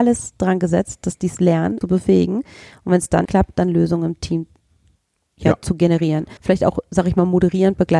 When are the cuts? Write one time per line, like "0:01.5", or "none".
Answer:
0:01.8
0:03.2
0:06.4